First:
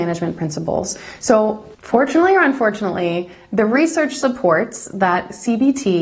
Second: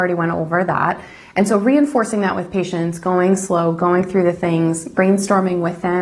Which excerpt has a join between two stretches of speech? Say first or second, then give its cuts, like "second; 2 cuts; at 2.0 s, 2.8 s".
first; 1 cut; at 1.7 s